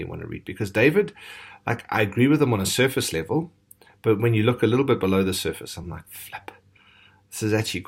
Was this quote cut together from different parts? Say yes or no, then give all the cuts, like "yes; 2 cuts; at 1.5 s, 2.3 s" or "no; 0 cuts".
no; 0 cuts